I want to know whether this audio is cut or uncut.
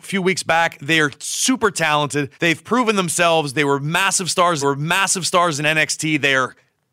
cut